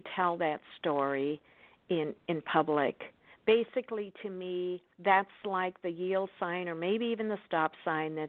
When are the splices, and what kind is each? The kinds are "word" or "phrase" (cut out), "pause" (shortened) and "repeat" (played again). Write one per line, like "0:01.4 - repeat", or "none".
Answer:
0:04.9 - pause